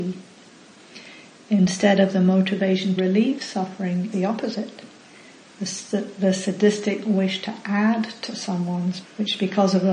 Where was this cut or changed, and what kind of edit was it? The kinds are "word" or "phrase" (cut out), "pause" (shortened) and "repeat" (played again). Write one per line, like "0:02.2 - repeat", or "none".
0:03.0 - word
0:04.1 - word
0:09.0 - word